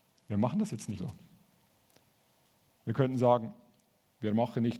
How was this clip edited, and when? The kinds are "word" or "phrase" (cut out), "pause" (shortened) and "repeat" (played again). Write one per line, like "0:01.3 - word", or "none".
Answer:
0:01.0 - word